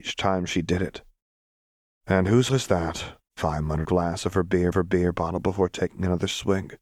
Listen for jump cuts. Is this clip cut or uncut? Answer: cut